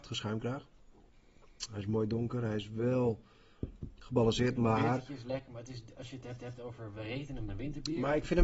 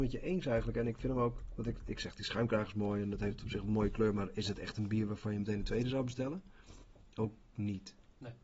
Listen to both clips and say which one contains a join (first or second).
first